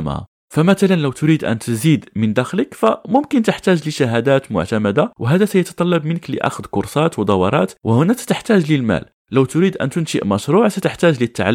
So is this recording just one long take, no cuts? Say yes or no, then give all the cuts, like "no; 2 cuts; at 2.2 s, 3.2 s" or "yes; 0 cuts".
yes; 0 cuts